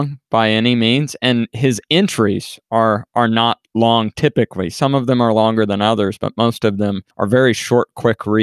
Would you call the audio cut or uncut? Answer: cut